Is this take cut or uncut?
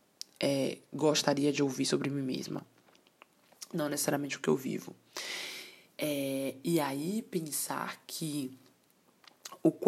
uncut